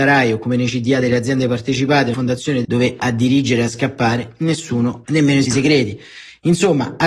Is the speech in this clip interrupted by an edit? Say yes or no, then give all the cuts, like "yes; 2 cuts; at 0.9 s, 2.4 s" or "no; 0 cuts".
yes; 4 cuts; at 2.1 s, 2.6 s, 5.1 s, 5.4 s